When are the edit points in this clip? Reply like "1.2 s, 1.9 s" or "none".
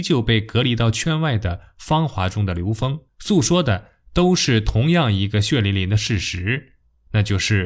3.1 s